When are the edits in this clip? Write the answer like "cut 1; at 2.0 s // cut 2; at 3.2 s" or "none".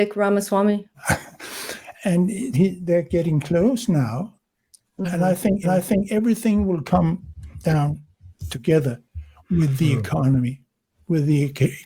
cut 1; at 0.9 s // cut 2; at 2.5 s // cut 3; at 5.6 s